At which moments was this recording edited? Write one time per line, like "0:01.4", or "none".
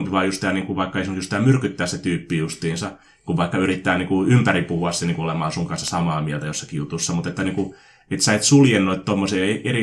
none